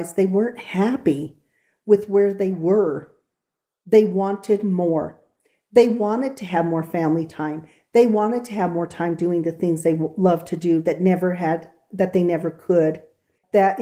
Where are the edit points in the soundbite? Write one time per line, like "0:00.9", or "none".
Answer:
none